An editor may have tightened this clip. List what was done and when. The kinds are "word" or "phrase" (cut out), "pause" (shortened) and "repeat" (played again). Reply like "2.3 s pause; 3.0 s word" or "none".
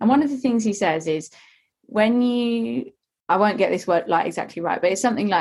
none